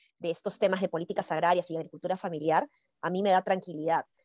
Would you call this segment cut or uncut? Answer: uncut